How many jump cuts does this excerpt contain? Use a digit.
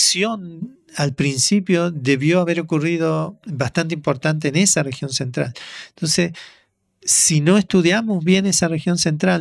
0